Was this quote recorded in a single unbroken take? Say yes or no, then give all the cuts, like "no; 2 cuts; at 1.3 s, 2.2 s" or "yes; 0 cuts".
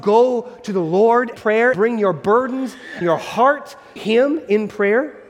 no; 4 cuts; at 1.3 s, 1.7 s, 3.0 s, 4.0 s